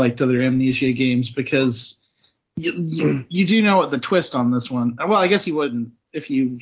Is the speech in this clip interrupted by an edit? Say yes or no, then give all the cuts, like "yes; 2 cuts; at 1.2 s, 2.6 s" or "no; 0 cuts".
no; 0 cuts